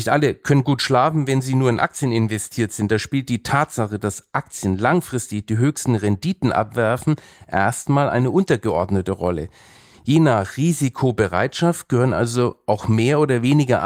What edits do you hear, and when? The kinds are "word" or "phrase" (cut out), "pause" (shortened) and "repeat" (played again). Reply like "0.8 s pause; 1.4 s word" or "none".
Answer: none